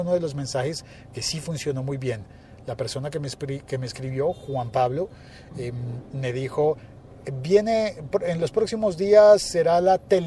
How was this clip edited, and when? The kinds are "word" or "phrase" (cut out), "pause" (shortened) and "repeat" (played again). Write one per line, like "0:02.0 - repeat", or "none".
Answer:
none